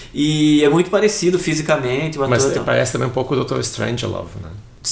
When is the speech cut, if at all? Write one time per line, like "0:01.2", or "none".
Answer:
none